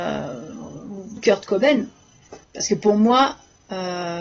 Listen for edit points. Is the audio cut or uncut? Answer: cut